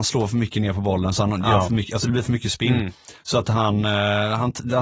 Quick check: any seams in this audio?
no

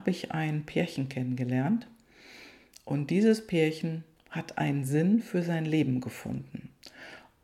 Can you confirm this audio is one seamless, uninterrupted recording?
yes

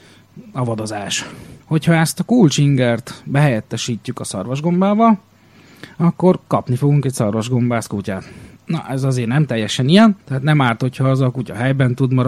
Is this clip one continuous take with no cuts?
no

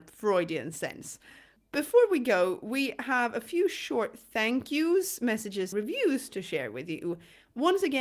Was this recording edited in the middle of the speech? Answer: yes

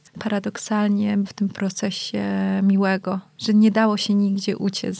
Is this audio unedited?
yes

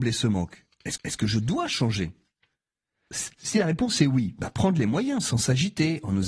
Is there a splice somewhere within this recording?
yes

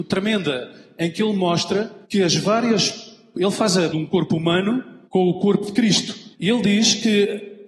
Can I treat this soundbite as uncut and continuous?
no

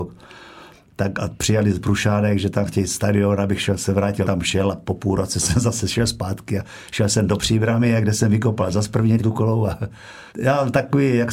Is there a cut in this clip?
yes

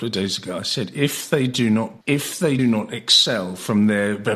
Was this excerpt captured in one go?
no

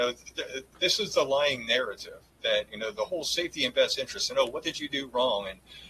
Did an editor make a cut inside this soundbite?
no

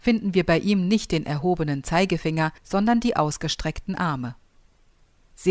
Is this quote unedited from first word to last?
no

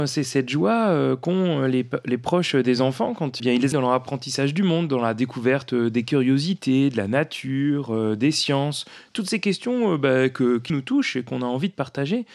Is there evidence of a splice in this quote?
yes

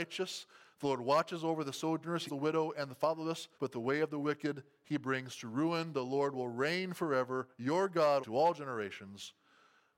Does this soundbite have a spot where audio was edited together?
yes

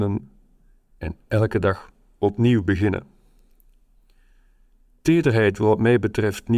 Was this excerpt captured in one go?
yes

